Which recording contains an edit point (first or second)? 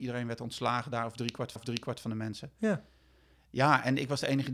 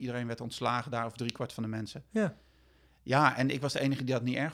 first